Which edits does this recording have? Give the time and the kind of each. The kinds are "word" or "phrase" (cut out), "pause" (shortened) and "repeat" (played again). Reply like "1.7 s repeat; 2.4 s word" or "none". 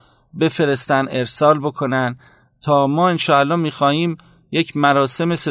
none